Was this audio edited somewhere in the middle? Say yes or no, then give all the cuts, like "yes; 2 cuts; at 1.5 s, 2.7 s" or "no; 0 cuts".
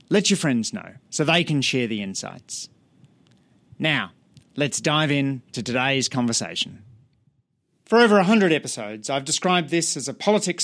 yes; 1 cut; at 1.0 s